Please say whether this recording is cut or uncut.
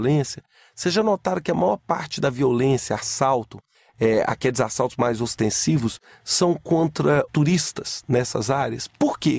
cut